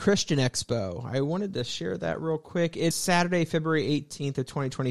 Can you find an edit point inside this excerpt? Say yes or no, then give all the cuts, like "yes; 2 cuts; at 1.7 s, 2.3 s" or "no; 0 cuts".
yes; 1 cut; at 2.9 s